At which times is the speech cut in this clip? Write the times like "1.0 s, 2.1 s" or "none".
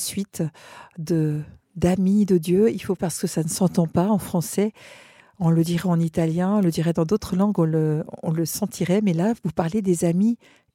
3.0 s